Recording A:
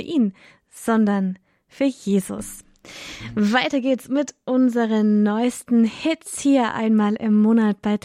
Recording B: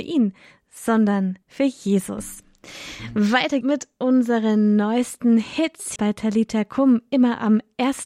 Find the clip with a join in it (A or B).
B